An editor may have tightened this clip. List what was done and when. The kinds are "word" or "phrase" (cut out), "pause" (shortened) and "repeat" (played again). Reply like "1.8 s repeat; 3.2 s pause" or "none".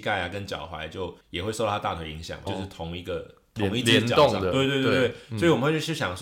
1.2 s pause; 2.5 s word